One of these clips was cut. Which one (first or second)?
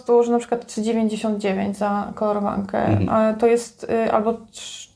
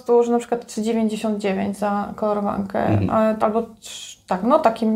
second